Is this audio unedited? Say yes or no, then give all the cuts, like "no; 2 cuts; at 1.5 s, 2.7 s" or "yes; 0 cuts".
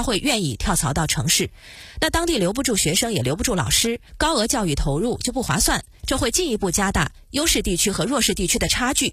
no; 1 cut; at 4.1 s